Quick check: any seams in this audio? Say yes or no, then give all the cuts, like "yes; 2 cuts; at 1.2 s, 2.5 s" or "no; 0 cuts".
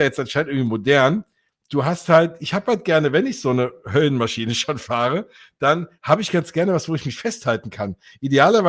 no; 0 cuts